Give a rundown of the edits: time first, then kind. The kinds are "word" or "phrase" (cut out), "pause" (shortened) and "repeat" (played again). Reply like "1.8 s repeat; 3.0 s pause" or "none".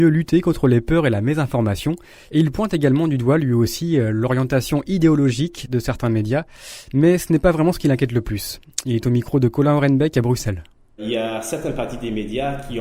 none